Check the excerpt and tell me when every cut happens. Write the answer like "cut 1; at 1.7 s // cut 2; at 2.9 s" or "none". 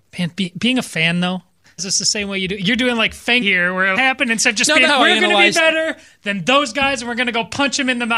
cut 1; at 1.8 s // cut 2; at 3.4 s // cut 3; at 4.0 s // cut 4; at 4.9 s